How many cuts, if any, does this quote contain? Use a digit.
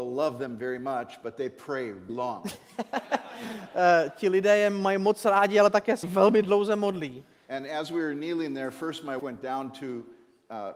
3